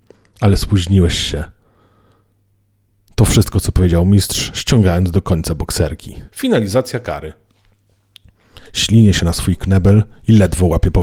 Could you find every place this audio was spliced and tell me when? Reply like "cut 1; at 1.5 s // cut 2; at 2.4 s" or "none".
cut 1; at 6.3 s // cut 2; at 8.7 s